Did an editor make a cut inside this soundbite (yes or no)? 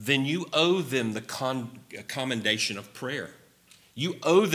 no